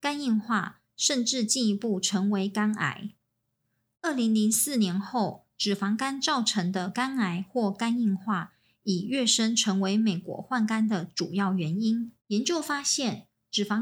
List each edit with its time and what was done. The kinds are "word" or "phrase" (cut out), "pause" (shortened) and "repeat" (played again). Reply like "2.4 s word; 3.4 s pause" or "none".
12.2 s pause

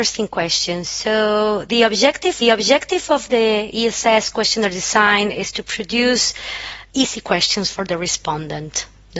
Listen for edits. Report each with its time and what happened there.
2.4 s repeat; 6.9 s word

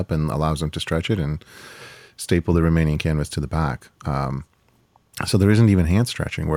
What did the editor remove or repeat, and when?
none

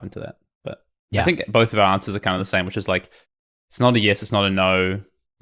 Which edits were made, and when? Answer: none

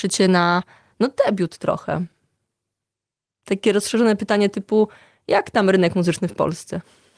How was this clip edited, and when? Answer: none

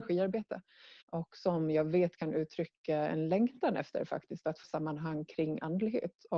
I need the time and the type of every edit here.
1.0 s pause; 4.6 s phrase

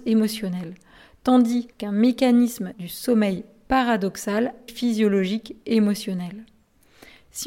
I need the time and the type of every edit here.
1.7 s pause; 2.7 s word; 4.7 s phrase

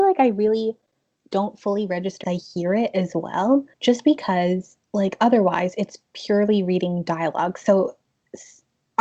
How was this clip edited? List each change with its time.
2.2 s phrase; 3.7 s pause; 4.8 s pause

